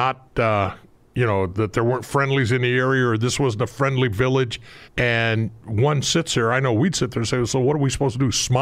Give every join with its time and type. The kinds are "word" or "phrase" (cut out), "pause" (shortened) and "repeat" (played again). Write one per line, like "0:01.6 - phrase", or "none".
0:04.8 - pause